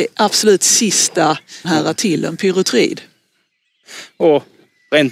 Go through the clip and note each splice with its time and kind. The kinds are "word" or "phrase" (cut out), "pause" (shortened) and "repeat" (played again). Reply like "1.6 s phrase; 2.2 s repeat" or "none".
1.6 s word; 2.0 s word